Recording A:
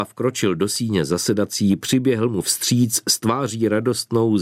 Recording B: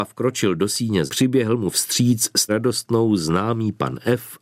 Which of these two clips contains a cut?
B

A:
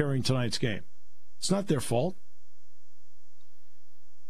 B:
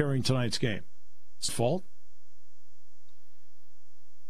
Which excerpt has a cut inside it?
B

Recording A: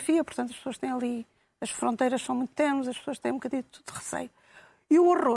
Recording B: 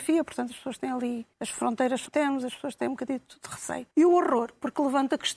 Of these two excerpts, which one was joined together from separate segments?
B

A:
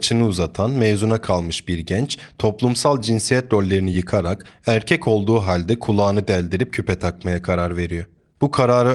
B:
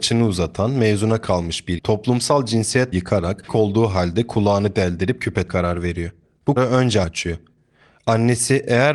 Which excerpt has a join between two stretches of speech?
B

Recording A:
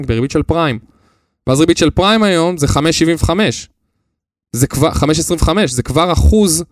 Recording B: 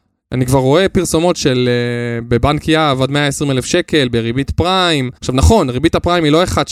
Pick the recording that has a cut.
B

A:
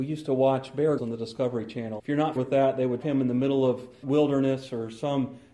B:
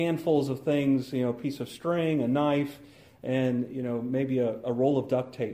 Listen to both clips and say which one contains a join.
A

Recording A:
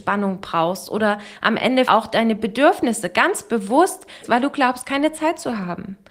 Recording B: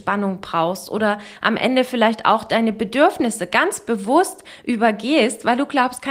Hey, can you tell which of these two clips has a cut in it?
A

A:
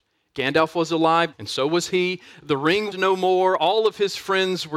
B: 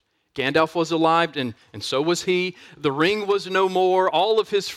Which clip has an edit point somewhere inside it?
A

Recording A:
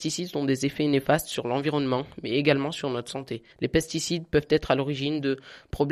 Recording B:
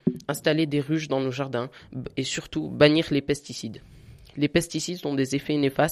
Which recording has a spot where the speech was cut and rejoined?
A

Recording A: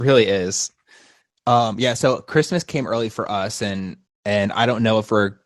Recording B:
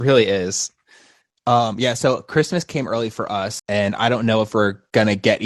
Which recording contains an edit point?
B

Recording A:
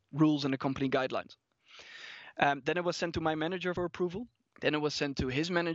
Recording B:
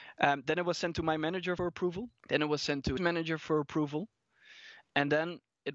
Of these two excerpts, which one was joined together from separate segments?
B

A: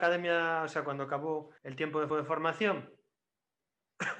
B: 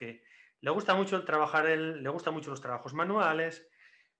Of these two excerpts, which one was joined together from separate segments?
A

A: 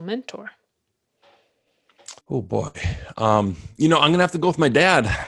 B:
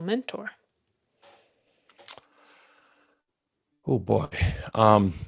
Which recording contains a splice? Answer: A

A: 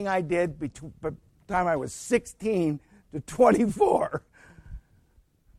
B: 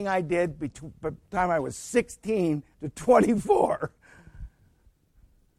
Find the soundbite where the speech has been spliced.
B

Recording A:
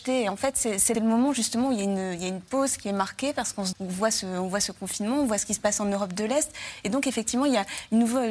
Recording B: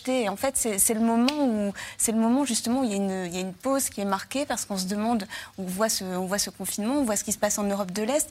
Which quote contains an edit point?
A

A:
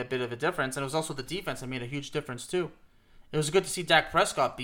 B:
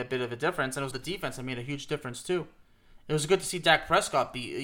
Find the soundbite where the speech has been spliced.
B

